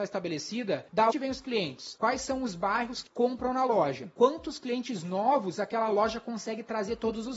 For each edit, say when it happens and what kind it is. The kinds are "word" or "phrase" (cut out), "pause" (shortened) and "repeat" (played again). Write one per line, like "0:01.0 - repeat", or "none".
0:01.1 - word
0:03.1 - word